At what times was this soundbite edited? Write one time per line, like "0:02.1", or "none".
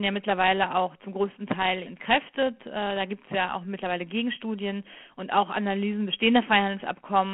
0:01.8